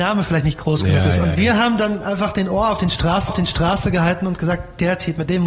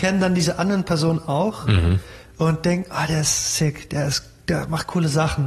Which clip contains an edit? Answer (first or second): first